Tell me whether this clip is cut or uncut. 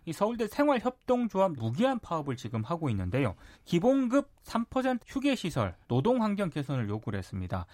cut